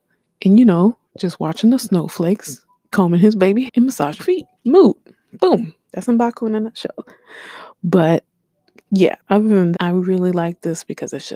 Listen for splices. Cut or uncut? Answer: cut